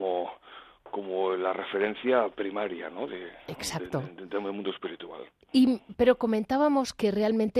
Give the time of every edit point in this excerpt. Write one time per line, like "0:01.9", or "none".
none